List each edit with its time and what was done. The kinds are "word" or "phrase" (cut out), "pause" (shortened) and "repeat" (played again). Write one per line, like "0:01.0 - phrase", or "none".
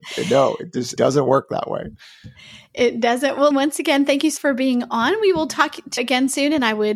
0:01.0 - word
0:03.5 - word
0:04.4 - word
0:06.0 - word